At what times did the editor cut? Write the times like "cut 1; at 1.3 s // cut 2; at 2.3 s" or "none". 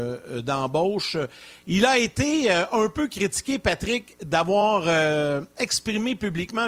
none